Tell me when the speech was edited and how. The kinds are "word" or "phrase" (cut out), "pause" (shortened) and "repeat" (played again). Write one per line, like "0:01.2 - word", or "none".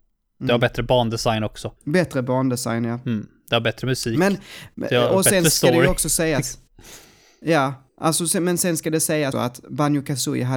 0:01.8 - pause
0:09.3 - word